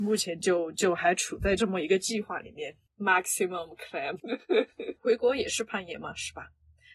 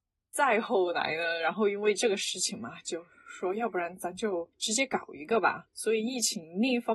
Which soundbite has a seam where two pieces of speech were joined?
second; 1 cut; at 4.5 s

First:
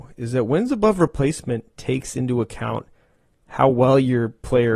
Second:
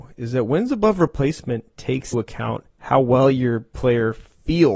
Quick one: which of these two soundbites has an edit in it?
second; 2 cuts; at 2.1 s, 2.7 s

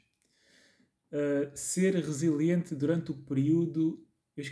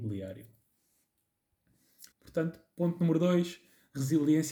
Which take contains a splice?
second; 1 cut; at 2.1 s

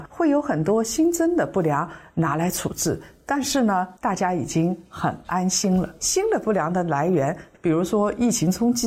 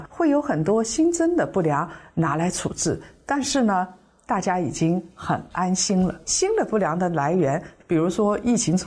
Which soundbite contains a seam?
first; 1 cut; at 4.0 s

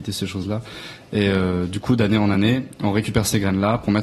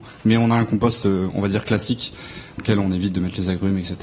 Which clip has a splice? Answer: second; 1 cut; at 2.6 s

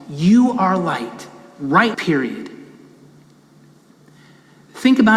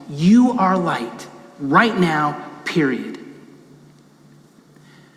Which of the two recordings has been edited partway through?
first; 1 cut; at 1.9 s

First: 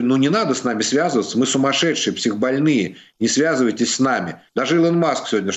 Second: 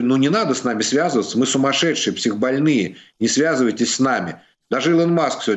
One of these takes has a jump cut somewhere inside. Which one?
first; 1 cut; at 4.5 s

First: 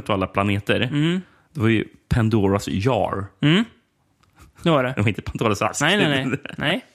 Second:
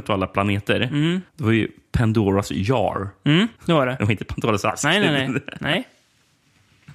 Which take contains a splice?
second; 2 cuts; at 1.3 s, 3.6 s

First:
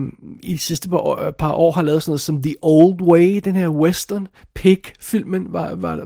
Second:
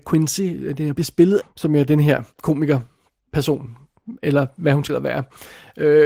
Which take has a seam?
second; 4 cuts; at 0.9 s, 1.4 s, 2.3 s, 4.9 s

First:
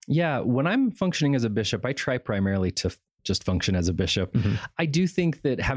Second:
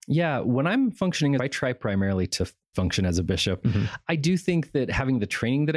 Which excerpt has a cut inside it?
second; 2 cuts; at 1.4 s, 2.7 s

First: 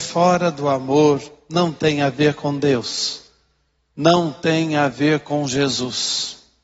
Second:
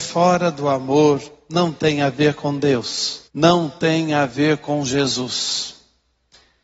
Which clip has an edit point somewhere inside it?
second; 1 cut; at 3.3 s

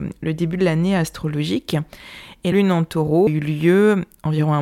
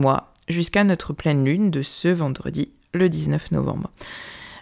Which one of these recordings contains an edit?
first; 2 cuts; at 2.5 s, 3.3 s

